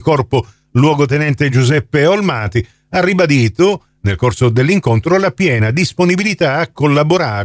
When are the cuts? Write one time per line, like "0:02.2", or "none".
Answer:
none